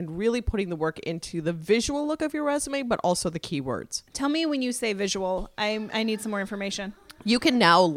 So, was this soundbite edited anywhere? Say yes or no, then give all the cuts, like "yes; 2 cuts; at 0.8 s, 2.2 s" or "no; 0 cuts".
yes; 1 cut; at 4.1 s